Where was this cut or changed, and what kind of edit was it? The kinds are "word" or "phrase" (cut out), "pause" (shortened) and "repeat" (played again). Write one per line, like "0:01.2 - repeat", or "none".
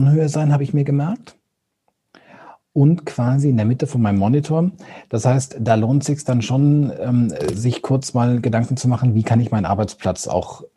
none